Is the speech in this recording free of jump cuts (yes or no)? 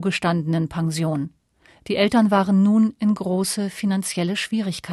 yes